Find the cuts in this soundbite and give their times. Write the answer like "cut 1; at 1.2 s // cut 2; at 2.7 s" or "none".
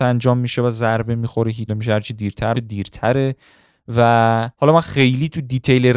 cut 1; at 1.7 s // cut 2; at 2.5 s // cut 3; at 4.5 s